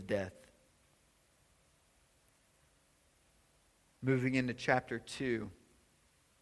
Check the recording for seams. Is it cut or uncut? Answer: uncut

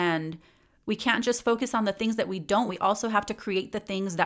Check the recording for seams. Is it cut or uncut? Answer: cut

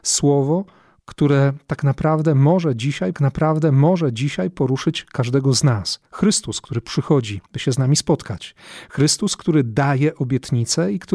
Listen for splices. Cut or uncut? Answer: cut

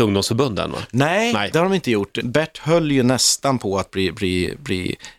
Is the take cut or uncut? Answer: cut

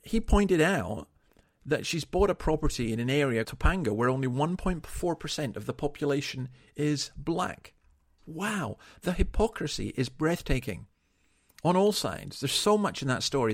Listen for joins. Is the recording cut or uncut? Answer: cut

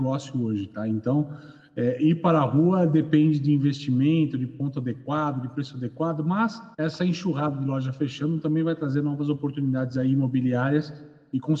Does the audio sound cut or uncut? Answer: cut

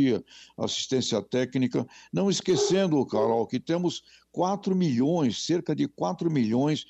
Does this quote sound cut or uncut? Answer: uncut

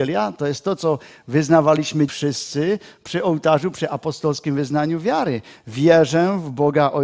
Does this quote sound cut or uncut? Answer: cut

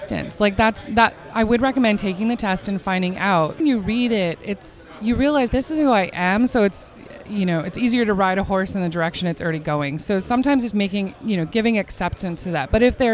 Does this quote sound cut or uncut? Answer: cut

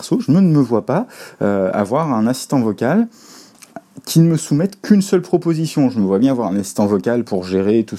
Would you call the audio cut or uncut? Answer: uncut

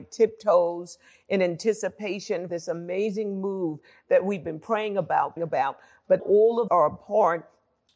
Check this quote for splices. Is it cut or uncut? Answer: cut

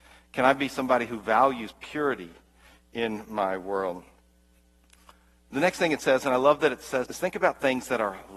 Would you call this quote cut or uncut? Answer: cut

